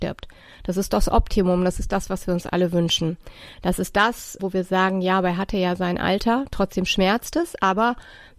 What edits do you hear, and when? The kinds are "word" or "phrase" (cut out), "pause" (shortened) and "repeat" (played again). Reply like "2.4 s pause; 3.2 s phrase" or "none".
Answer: 4.4 s word